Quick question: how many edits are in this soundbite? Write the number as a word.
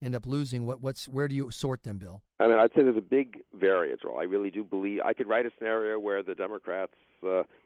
three